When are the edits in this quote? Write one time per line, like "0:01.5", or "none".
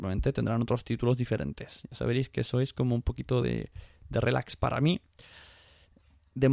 none